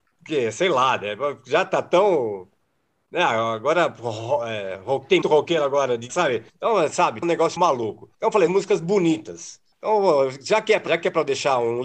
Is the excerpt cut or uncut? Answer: cut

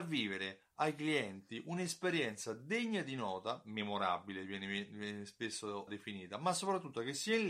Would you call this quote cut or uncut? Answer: cut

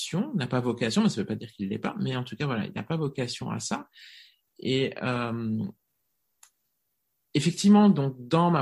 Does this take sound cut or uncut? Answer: uncut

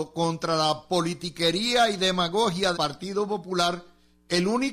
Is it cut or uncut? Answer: cut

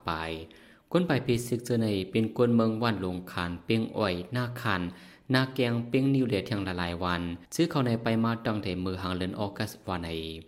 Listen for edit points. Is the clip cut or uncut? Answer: cut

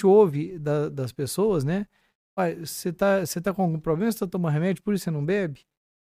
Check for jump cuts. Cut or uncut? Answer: uncut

